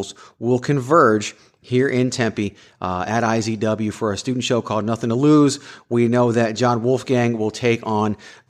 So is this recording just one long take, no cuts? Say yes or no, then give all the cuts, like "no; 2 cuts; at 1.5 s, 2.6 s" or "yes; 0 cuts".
yes; 0 cuts